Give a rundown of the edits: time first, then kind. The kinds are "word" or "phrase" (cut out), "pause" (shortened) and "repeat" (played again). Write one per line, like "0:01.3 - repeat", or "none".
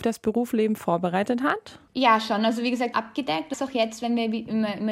0:01.9 - pause
0:02.9 - phrase
0:03.5 - phrase